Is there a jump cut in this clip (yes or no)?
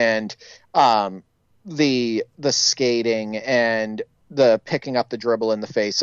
yes